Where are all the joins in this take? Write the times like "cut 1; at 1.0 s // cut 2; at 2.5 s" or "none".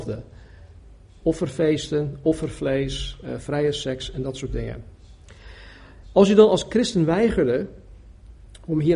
none

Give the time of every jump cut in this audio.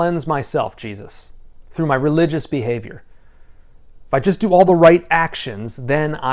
none

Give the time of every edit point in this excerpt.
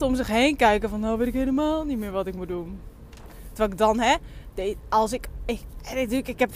none

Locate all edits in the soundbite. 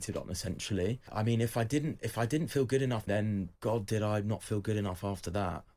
cut 1; at 3.1 s // cut 2; at 3.6 s

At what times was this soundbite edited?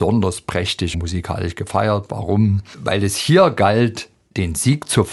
cut 1; at 0.9 s

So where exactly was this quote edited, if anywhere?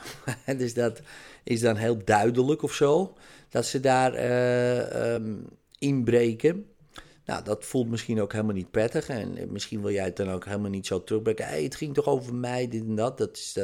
none

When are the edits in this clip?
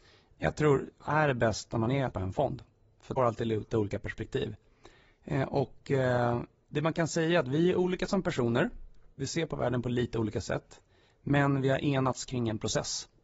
cut 1; at 1.1 s // cut 2; at 2.1 s // cut 3; at 3.2 s // cut 4; at 9.1 s

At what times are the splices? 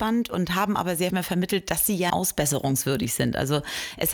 cut 1; at 1.1 s // cut 2; at 2.1 s

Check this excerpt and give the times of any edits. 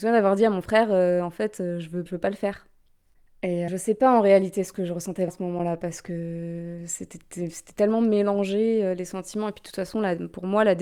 cut 1; at 2.1 s // cut 2; at 3.7 s // cut 3; at 5.3 s

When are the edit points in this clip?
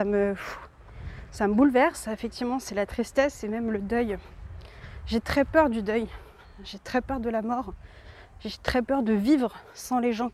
none

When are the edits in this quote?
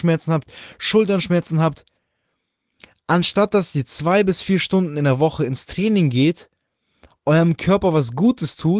none

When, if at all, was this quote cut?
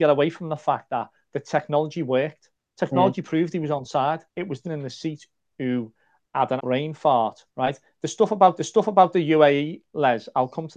cut 1; at 2.5 s // cut 2; at 4.3 s // cut 3; at 4.6 s // cut 4; at 6.6 s // cut 5; at 7.5 s // cut 6; at 8.6 s

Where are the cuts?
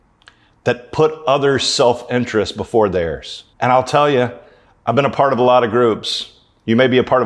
cut 1; at 3.5 s

